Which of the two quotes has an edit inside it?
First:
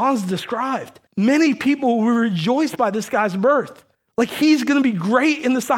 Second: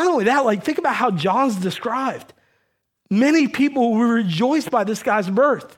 first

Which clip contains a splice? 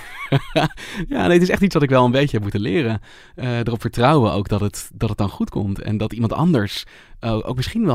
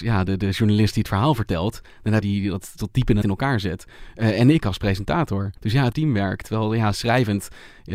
second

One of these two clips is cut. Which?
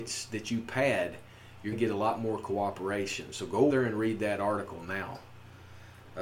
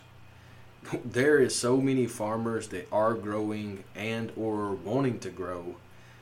first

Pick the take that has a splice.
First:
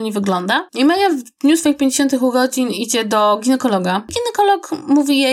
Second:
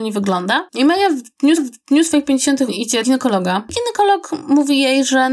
second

